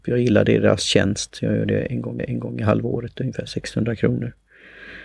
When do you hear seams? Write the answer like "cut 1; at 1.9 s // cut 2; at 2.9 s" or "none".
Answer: cut 1; at 2.2 s